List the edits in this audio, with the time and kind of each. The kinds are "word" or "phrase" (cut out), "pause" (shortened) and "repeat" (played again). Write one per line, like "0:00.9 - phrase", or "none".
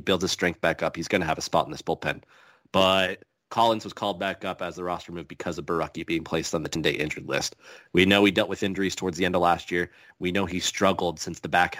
none